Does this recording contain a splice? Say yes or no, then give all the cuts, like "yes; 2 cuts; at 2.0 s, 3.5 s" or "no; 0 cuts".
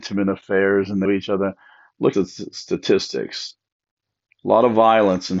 yes; 2 cuts; at 1.0 s, 2.1 s